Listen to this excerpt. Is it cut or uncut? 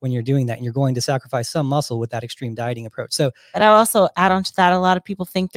uncut